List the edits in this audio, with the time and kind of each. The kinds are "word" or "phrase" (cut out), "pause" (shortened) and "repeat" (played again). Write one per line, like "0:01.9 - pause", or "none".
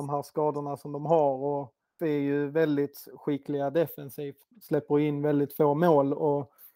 0:02.0 - word
0:04.5 - word